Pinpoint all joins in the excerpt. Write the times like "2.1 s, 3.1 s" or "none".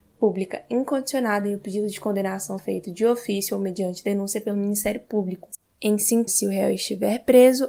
2.6 s, 6.3 s